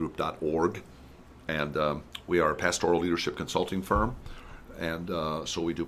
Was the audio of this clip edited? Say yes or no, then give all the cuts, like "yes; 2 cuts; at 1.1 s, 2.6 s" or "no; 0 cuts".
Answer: no; 0 cuts